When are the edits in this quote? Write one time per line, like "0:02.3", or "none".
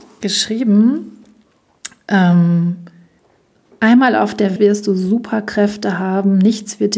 0:04.6